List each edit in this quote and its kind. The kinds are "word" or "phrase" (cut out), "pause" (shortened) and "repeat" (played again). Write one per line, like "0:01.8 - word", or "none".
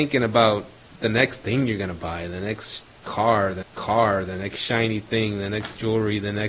0:03.6 - repeat